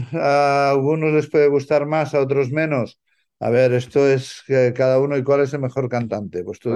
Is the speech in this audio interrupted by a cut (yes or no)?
no